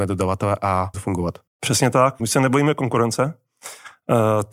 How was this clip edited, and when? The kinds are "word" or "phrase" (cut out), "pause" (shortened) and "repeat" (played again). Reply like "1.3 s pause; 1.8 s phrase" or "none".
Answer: 0.9 s word; 1.5 s pause; 2.2 s word